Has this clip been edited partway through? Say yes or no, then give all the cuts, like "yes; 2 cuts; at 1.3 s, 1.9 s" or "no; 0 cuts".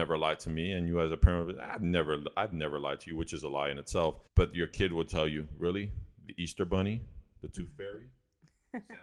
yes; 1 cut; at 4.3 s